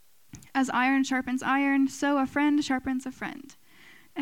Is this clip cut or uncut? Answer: uncut